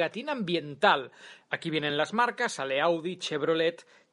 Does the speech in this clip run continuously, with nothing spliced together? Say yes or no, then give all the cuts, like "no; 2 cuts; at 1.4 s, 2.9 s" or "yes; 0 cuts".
yes; 0 cuts